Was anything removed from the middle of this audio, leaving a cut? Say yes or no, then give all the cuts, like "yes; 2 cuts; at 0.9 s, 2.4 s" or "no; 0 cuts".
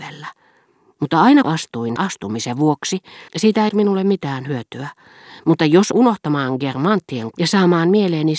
yes; 6 cuts; at 1.4 s, 2.0 s, 3.3 s, 3.7 s, 5.9 s, 7.3 s